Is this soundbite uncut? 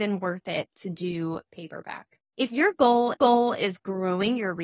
no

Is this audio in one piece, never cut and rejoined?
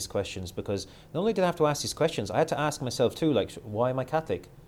yes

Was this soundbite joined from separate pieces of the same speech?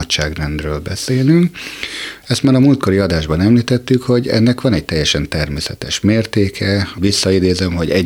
no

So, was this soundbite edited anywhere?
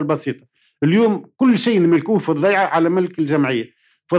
no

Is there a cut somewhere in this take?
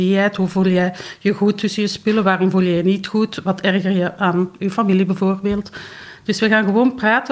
no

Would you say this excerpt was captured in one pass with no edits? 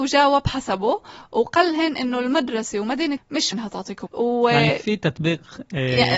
no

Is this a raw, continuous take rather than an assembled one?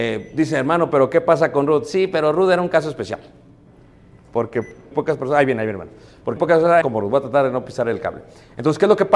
no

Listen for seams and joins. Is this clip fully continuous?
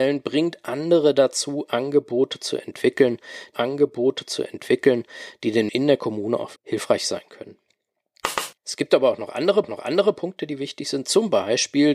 no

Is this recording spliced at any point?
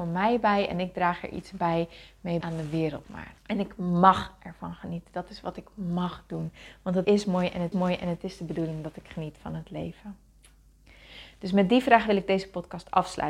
yes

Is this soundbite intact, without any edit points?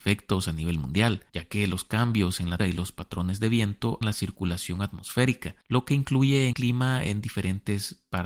no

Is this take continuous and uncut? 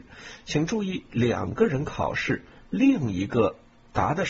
yes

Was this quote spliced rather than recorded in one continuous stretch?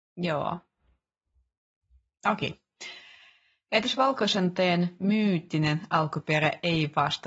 no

